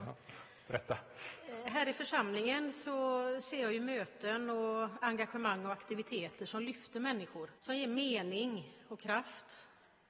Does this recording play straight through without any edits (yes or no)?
no